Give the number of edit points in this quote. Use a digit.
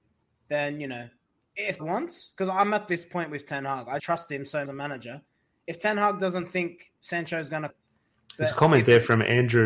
4